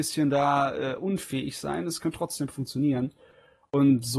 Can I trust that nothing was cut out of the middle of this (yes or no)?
yes